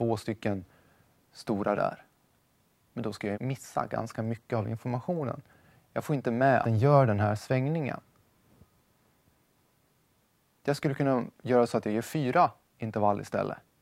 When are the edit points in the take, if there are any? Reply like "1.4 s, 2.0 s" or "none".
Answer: 1.8 s, 3.3 s, 6.6 s